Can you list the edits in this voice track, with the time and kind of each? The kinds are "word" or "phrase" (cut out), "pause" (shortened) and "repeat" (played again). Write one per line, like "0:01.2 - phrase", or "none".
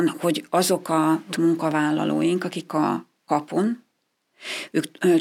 0:01.3 - word
0:02.7 - word